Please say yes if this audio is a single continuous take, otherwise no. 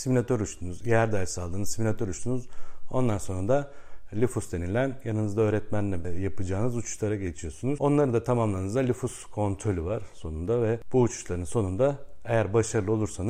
yes